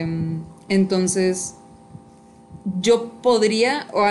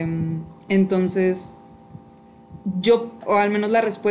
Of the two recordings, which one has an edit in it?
second; 1 cut; at 3.2 s

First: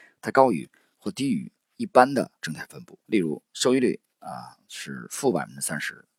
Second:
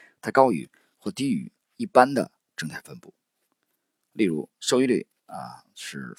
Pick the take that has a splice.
first; 2 cuts; at 2.4 s, 3.0 s

